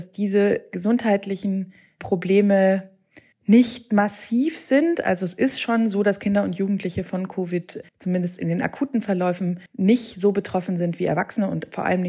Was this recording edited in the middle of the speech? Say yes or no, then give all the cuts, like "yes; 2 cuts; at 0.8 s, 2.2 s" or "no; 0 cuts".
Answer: yes; 3 cuts; at 3.3 s, 7.9 s, 9.7 s